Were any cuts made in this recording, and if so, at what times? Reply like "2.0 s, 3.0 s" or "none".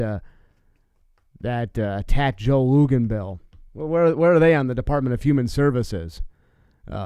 3.7 s